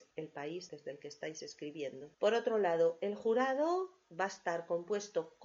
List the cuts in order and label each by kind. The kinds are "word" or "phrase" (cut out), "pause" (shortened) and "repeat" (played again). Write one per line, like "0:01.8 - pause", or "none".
0:02.1 - pause